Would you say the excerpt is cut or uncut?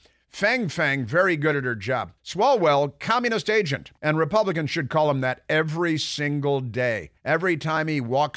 cut